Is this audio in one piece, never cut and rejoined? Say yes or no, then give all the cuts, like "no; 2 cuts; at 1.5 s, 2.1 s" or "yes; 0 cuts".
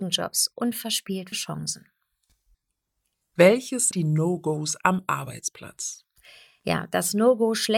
no; 2 cuts; at 1.3 s, 3.9 s